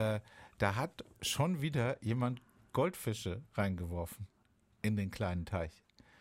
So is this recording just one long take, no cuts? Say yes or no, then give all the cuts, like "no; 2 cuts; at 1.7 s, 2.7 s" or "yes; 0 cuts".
yes; 0 cuts